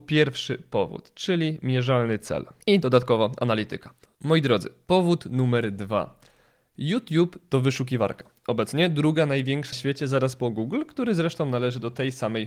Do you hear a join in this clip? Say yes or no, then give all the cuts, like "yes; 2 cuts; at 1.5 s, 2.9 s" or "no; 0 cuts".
yes; 2 cuts; at 2.6 s, 9.7 s